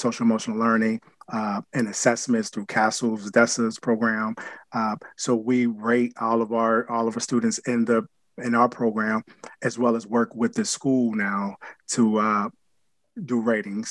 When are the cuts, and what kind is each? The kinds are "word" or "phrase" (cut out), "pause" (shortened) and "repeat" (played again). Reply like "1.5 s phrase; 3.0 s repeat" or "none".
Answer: none